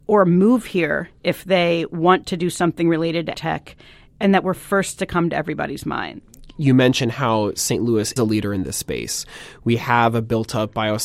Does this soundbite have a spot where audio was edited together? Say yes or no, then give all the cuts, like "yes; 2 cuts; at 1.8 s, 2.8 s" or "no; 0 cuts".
yes; 2 cuts; at 3.3 s, 8.2 s